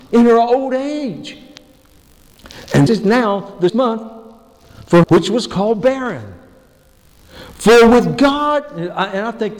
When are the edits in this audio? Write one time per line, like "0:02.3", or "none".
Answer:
0:02.9
0:03.7
0:05.0